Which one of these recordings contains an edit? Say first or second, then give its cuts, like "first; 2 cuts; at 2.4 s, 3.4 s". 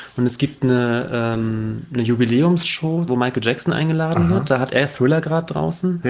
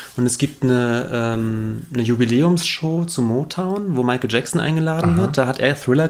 first; 1 cut; at 3.1 s